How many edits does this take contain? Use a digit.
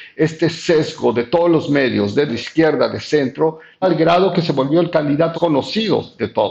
3